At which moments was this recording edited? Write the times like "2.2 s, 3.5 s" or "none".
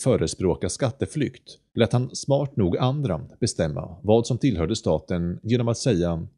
1.7 s